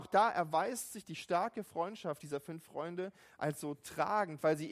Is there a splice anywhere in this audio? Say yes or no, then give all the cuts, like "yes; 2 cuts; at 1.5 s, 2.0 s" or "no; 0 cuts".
no; 0 cuts